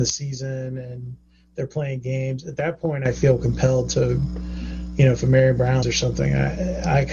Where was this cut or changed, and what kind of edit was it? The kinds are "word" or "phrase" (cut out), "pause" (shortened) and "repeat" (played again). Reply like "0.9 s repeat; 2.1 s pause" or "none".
5.8 s word